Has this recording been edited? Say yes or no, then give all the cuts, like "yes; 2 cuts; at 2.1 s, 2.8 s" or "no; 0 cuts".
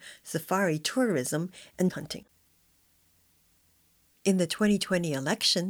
yes; 1 cut; at 1.9 s